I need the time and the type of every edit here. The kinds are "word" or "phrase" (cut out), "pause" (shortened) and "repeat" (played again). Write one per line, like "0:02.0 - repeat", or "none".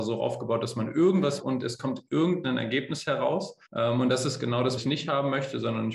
0:01.4 - word
0:03.7 - pause
0:04.8 - word